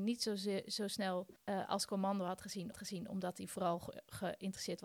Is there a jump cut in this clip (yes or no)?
yes